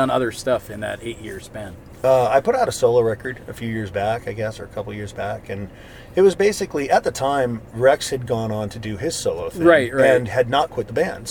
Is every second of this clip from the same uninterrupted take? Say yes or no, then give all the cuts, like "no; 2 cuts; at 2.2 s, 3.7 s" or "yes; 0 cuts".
yes; 0 cuts